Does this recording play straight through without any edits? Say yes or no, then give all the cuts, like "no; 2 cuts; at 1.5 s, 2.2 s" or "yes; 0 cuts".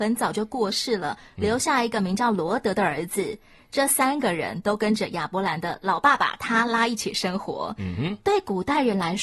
yes; 0 cuts